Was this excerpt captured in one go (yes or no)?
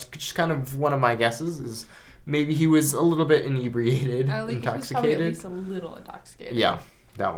yes